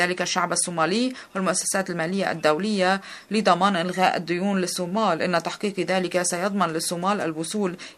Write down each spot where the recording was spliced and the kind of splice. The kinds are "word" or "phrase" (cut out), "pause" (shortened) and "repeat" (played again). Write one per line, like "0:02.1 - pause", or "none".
none